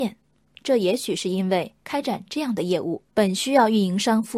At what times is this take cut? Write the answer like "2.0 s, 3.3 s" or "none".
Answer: 1.8 s, 3.1 s